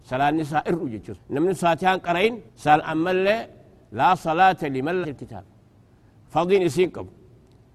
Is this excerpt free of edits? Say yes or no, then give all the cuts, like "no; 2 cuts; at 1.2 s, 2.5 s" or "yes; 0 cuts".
no; 3 cuts; at 1.2 s, 2.5 s, 5.0 s